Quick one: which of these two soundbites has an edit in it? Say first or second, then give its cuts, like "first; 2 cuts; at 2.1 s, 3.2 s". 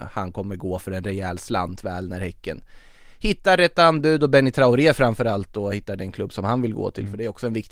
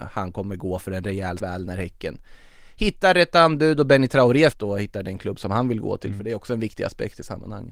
second; 2 cuts; at 1.4 s, 4.5 s